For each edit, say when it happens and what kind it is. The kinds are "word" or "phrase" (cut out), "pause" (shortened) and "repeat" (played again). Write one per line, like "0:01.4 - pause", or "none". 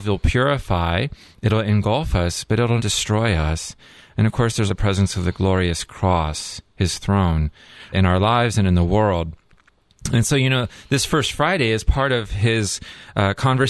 0:02.8 - word
0:04.7 - word
0:07.9 - word